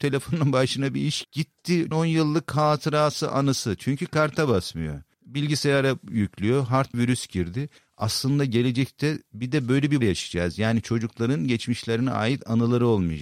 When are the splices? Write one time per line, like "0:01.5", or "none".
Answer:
0:01.2
0:01.9
0:06.9
0:10.0